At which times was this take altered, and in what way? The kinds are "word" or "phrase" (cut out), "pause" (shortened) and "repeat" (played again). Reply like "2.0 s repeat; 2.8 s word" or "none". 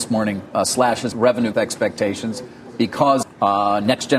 1.1 s word; 1.5 s word; 3.2 s word